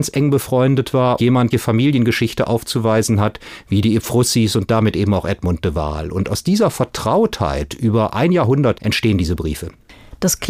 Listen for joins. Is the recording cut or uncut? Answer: cut